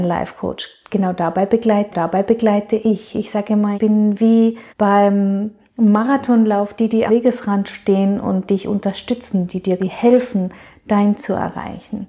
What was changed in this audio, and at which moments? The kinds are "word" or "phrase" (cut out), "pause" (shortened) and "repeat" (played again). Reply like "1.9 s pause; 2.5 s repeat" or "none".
1.9 s repeat; 3.7 s word; 4.7 s pause; 7.1 s word; 9.8 s word; 11.2 s word

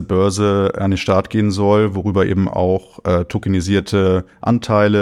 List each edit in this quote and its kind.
none

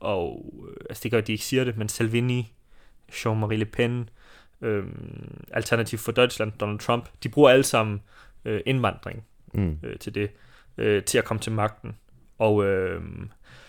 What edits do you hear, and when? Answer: none

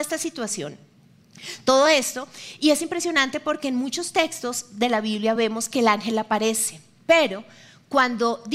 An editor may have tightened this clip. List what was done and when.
none

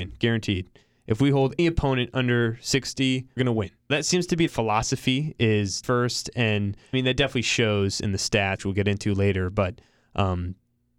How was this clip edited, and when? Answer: 1.6 s word; 3.4 s word; 3.9 s word; 4.5 s word; 5.8 s word; 6.9 s word; 8.6 s word

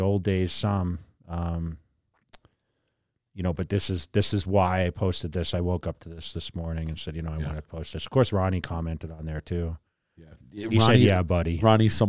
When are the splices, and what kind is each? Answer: none

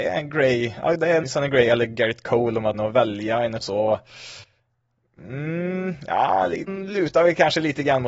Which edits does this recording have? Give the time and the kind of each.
1.2 s word; 2.7 s word; 3.6 s word; 6.7 s word

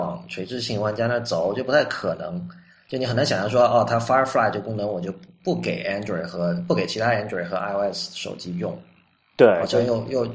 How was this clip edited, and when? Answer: none

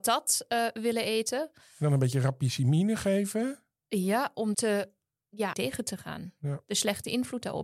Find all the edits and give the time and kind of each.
4.5 s word; 5.5 s word

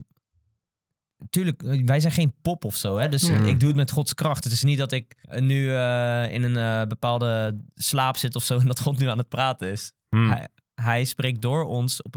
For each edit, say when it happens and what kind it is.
5.2 s pause

